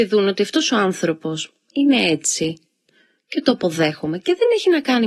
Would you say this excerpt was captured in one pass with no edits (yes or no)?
yes